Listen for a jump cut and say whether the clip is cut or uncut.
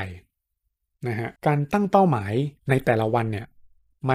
cut